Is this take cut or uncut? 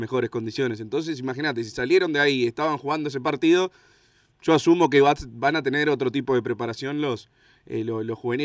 uncut